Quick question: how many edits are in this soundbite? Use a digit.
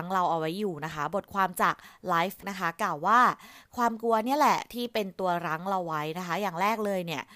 1